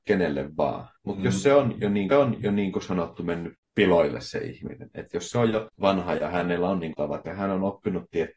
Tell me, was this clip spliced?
yes; 4 cuts; at 1.0 s, 2.1 s, 5.7 s, 6.9 s

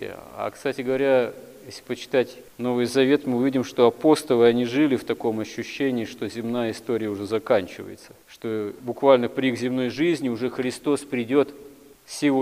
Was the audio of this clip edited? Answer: yes; 2 cuts; at 2.5 s, 8.2 s

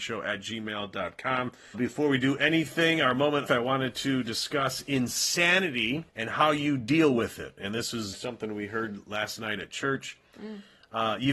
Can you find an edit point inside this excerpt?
yes; 4 cuts; at 1.7 s, 3.5 s, 6.1 s, 8.1 s

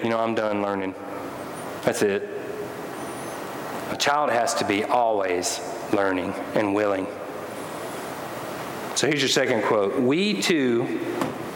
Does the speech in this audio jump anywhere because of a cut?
no; 0 cuts

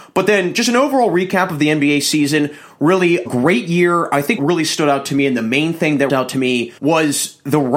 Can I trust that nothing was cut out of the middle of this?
no; 4 cuts; at 3.3 s, 4.4 s, 6.1 s, 6.8 s

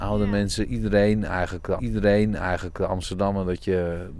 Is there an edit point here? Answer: yes; 1 cut; at 1.8 s

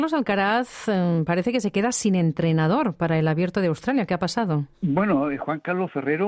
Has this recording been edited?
yes; 1 cut; at 4.7 s

